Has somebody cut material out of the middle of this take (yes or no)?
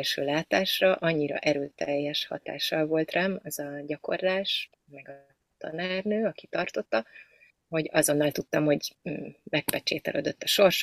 yes